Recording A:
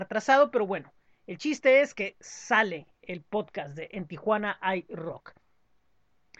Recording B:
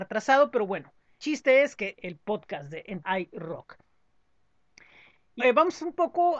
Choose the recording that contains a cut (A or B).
B